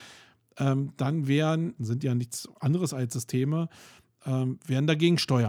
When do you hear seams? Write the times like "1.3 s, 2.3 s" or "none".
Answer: 1.8 s

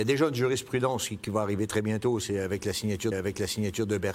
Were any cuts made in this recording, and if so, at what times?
3.1 s

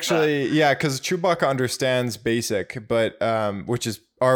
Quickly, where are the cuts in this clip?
none

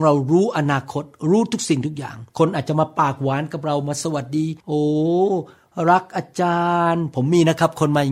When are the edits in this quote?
2.3 s, 4.6 s

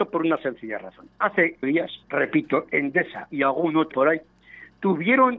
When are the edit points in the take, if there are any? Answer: 1.6 s, 2.0 s, 3.3 s, 3.9 s

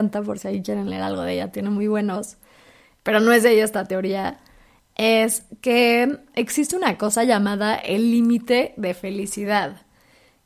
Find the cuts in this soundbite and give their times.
none

